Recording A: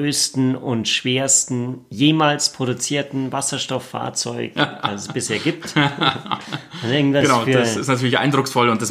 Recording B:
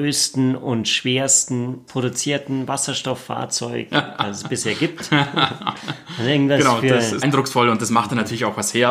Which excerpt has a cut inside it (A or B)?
B